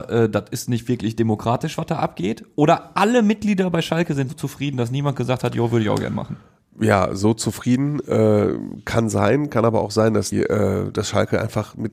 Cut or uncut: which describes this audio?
cut